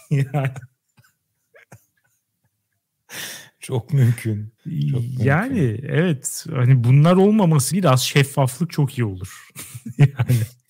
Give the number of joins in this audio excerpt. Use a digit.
2